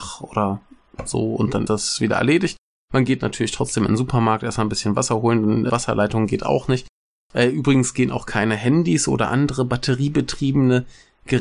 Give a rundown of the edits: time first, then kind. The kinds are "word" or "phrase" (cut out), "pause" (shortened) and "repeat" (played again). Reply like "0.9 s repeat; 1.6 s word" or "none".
1.7 s word; 5.7 s word